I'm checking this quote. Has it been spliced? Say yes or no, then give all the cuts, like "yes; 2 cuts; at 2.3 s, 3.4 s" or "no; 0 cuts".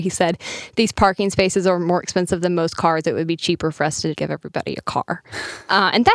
yes; 1 cut; at 4.1 s